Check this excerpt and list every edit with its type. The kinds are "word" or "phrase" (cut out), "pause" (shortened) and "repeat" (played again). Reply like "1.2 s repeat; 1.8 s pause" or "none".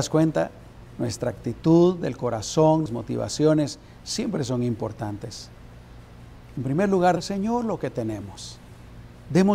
2.9 s word; 7.2 s word